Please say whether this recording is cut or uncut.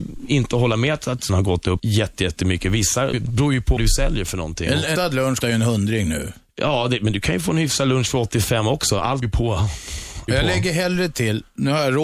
cut